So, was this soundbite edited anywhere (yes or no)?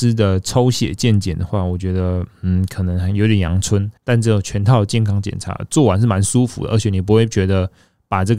yes